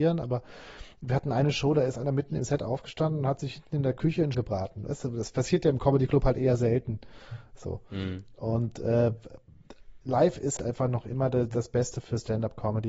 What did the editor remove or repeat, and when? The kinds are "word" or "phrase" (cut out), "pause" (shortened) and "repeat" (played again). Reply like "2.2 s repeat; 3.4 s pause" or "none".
4.3 s word; 10.0 s pause; 10.6 s word